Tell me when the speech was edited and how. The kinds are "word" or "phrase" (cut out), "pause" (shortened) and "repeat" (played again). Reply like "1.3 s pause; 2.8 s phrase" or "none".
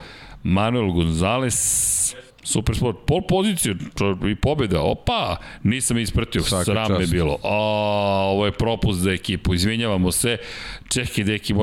2.3 s pause